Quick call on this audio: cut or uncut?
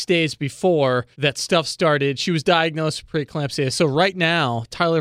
cut